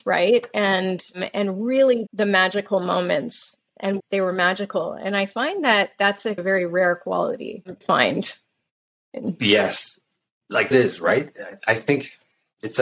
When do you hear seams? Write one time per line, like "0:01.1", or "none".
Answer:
0:02.1
0:04.0
0:06.4
0:07.8
0:10.7

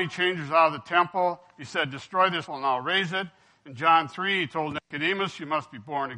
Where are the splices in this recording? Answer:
0:02.5

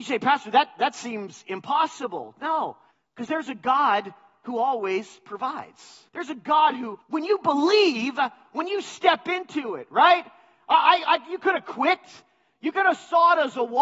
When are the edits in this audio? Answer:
0:02.9
0:06.1
0:07.0

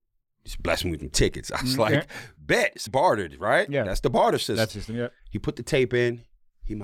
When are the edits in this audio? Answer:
0:02.9
0:04.7
0:05.2

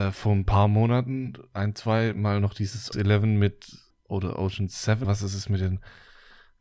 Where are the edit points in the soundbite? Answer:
0:02.9
0:03.9
0:05.0

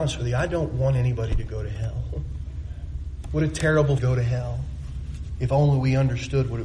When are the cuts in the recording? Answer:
0:04.0

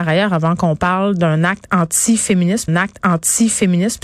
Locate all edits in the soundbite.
0:02.7

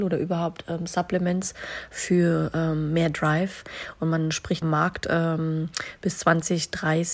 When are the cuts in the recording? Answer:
0:04.6

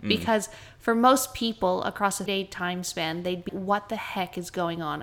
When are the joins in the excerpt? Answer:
0:02.3
0:03.5

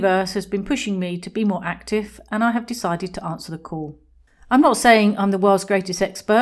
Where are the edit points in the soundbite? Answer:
none

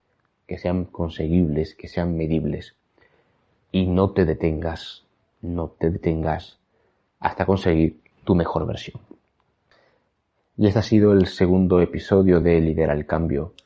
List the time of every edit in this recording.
none

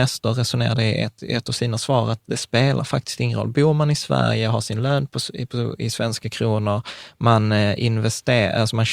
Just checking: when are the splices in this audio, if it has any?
none

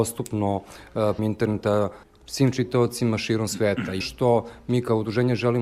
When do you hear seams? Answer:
0:01.2
0:02.0
0:04.0

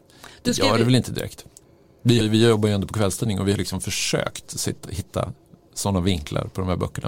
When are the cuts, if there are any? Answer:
0:02.2
0:03.6

